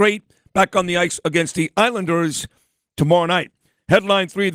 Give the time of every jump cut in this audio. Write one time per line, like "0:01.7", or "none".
none